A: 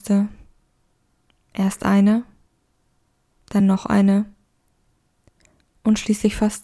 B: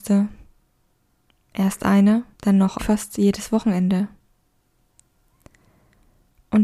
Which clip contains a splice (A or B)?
B